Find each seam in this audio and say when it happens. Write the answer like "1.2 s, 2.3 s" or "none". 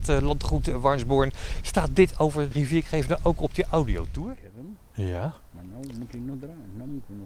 2.5 s

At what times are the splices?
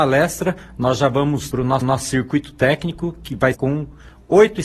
1.5 s, 1.8 s, 3.5 s

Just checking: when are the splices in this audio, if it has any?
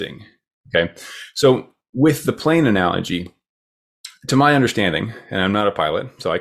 none

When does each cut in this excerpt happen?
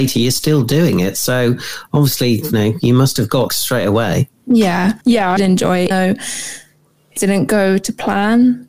2.5 s, 3.5 s, 5.0 s, 5.4 s, 5.9 s, 7.2 s

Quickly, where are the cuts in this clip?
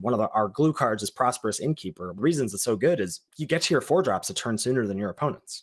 2.2 s

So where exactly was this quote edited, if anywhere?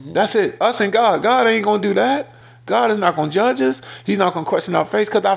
none

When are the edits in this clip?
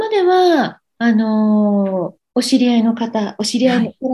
2.2 s

